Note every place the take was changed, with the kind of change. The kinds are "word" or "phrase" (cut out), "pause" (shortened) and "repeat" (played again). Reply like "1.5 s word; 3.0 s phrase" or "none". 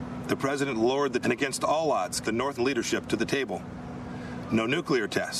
1.2 s word; 2.2 s word; 2.6 s word